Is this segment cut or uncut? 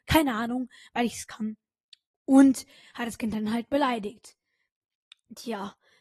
uncut